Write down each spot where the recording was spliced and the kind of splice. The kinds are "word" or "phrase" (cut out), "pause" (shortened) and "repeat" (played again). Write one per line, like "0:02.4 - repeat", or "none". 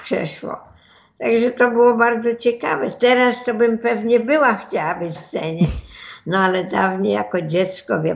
0:05.2 - word